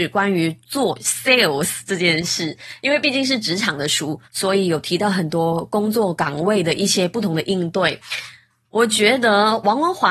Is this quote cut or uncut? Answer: cut